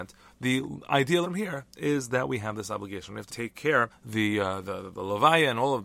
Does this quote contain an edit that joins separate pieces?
yes; 3 cuts; at 1.2 s, 3.3 s, 3.9 s

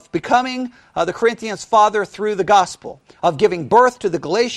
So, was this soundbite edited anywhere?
no; 0 cuts

